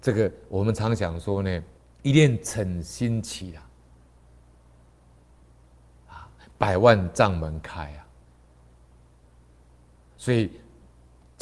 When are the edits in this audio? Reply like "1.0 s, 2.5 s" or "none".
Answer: 1.8 s